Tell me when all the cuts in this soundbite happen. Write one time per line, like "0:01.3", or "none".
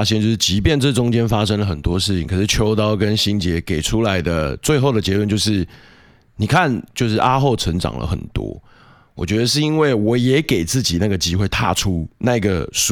none